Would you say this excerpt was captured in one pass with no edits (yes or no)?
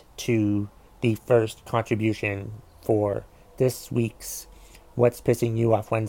yes